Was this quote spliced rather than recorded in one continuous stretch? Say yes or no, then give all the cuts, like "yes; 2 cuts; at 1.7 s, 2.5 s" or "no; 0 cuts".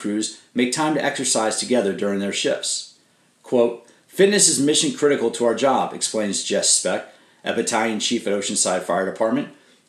no; 0 cuts